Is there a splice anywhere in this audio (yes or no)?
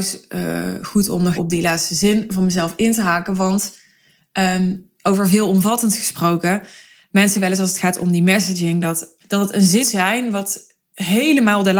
yes